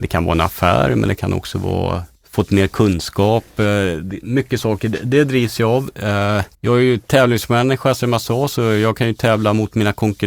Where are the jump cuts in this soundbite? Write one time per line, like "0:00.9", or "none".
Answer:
0:02.2
0:06.5